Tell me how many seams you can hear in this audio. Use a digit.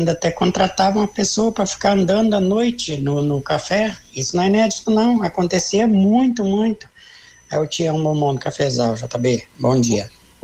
0